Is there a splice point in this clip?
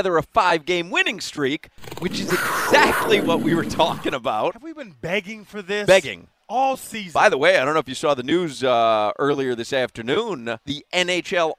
no; 0 cuts

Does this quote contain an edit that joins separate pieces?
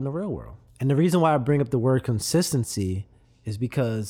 no; 0 cuts

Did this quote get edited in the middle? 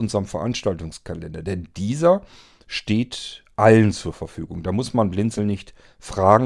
no; 0 cuts

